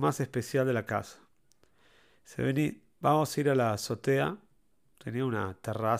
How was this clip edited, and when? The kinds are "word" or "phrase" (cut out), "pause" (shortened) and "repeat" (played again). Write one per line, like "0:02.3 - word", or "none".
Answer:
none